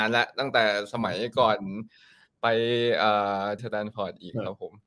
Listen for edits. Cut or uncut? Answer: cut